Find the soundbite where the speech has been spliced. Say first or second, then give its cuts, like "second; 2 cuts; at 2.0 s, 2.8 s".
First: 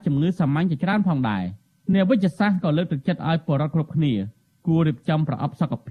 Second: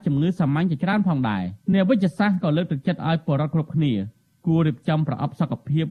second; 1 cut; at 1.6 s